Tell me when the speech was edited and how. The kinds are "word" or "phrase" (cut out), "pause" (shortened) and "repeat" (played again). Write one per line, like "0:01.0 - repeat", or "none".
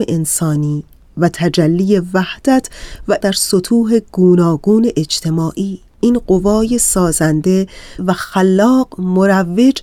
0:03.2 - word
0:05.9 - pause